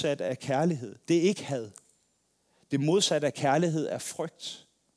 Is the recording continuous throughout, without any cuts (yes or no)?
no